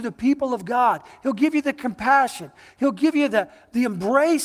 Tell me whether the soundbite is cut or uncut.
uncut